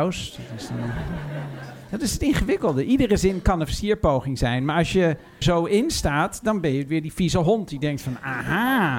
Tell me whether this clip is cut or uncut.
cut